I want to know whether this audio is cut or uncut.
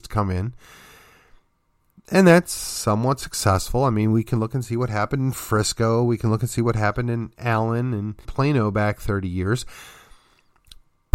cut